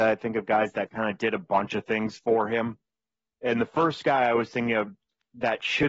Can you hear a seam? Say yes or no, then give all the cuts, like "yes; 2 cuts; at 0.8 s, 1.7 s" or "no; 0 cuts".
no; 0 cuts